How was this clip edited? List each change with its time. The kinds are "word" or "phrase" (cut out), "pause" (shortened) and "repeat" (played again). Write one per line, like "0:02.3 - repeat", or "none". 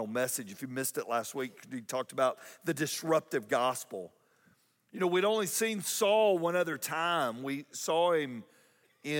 none

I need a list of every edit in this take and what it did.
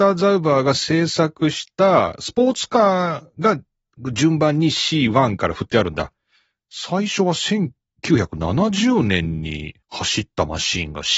0:09.8 - pause

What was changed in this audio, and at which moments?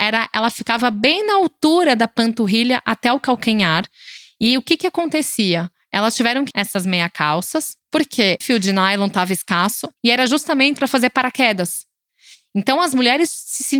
0:06.5 - word
0:08.4 - word
0:10.0 - pause
0:10.8 - word

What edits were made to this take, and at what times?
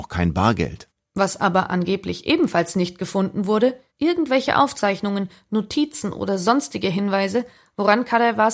none

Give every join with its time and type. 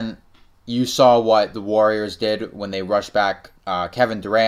0:03.6 - pause

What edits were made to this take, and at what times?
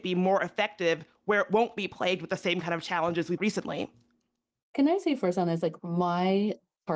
0:03.4 - phrase

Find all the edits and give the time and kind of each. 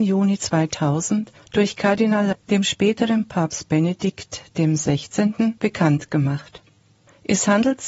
0:01.4 - pause
0:02.3 - word
0:05.6 - pause

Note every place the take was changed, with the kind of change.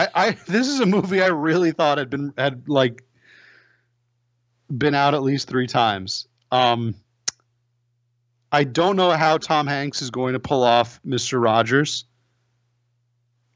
none

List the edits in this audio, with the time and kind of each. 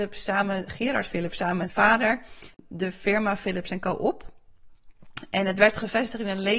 0:01.7 - word

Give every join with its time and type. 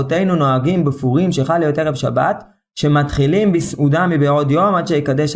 none

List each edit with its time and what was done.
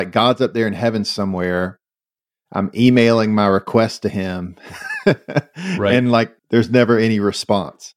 0:06.4 - pause

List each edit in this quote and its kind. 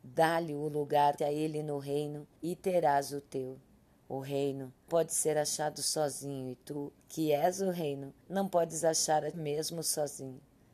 0:01.2 - phrase
0:02.4 - pause
0:03.9 - pause
0:04.9 - word
0:07.0 - pause
0:08.2 - pause
0:09.3 - word

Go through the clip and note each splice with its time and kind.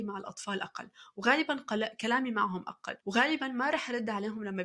0:03.0 - pause

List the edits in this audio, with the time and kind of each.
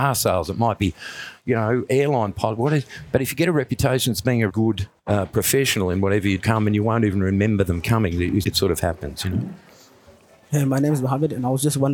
0:04.5 - word
0:05.0 - pause
0:06.4 - phrase
0:08.4 - word

